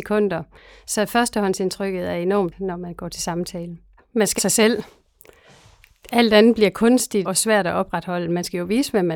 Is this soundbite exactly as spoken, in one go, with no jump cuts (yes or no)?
no